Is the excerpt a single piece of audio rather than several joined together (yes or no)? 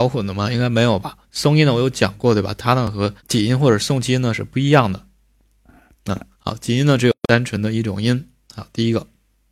no